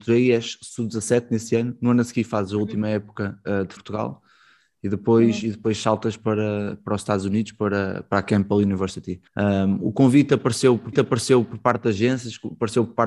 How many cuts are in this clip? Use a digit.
3